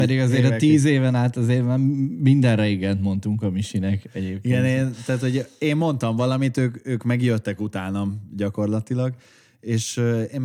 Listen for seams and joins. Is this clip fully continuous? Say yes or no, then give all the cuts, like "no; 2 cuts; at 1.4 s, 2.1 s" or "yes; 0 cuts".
yes; 0 cuts